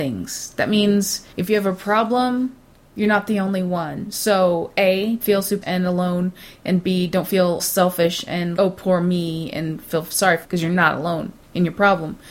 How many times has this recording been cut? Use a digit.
7